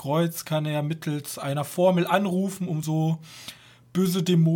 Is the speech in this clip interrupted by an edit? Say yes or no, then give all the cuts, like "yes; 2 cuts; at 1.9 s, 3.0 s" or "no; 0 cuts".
no; 0 cuts